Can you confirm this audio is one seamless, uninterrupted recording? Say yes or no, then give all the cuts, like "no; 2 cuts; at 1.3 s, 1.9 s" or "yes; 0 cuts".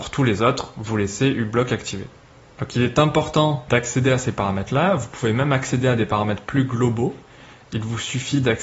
yes; 0 cuts